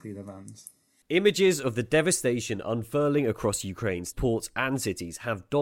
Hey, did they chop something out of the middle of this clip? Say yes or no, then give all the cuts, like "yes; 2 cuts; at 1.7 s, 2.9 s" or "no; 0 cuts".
yes; 1 cut; at 4.1 s